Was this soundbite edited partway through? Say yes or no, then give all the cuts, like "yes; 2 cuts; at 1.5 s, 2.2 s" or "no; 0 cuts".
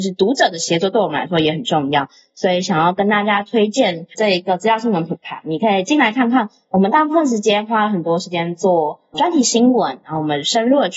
yes; 1 cut; at 4.1 s